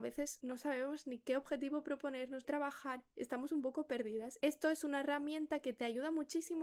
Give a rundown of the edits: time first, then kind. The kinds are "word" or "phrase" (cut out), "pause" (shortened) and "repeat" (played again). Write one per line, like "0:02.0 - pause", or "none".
0:02.4 - phrase